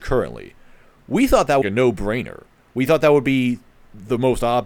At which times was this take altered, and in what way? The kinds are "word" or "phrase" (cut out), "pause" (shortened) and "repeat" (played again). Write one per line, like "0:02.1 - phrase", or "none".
0:01.6 - phrase